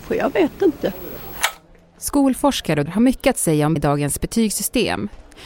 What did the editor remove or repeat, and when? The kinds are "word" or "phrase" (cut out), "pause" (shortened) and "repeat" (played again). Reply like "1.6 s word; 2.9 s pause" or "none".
2.9 s word; 3.8 s word